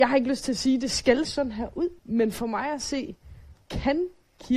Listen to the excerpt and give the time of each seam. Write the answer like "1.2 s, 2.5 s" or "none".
1.2 s, 2.0 s, 3.5 s